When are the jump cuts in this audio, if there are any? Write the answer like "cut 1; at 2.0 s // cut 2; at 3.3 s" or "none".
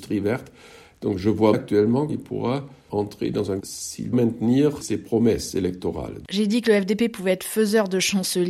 cut 1; at 1.5 s // cut 2; at 2.1 s // cut 3; at 2.9 s // cut 4; at 3.6 s // cut 5; at 4.1 s // cut 6; at 4.8 s